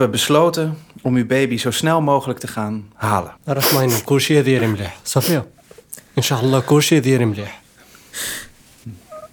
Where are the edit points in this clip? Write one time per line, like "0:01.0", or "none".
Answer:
0:03.4

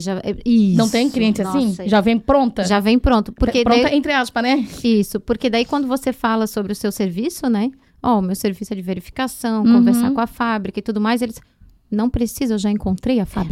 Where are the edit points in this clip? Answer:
none

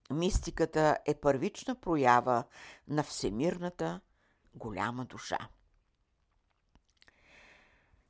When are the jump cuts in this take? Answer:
none

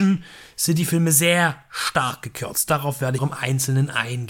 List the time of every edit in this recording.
0:03.2

